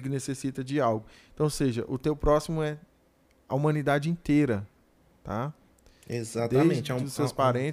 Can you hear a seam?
no; 0 cuts

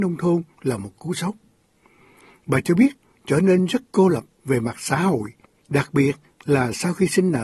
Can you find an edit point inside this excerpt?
no; 0 cuts

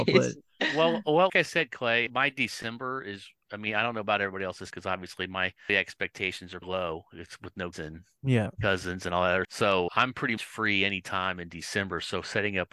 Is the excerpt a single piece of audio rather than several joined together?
no; 9 cuts; at 1.3 s, 2.1 s, 4.7 s, 5.7 s, 6.6 s, 7.7 s, 9.4 s, 9.9 s, 10.4 s

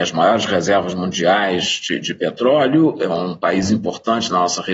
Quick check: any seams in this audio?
no; 0 cuts

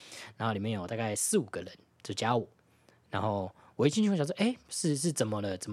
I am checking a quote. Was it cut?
no; 0 cuts

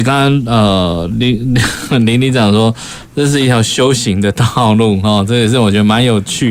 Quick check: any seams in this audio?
no; 0 cuts

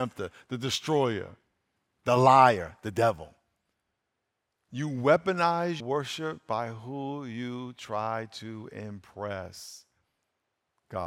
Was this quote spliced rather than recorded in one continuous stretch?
yes; 1 cut; at 5.8 s

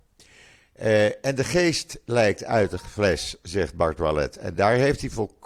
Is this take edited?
no; 0 cuts

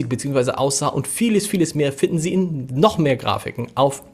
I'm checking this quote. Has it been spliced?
no; 0 cuts

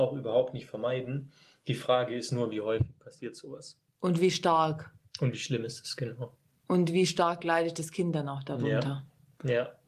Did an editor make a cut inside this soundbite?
no; 0 cuts

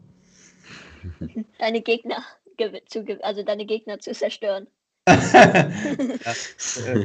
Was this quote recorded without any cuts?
no; 1 cut; at 1.5 s

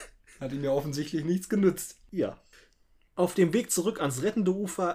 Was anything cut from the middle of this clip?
no; 0 cuts

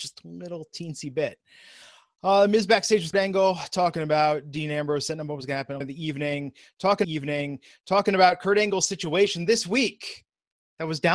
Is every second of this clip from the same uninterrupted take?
no; 3 cuts; at 3.1 s, 5.8 s, 7.0 s

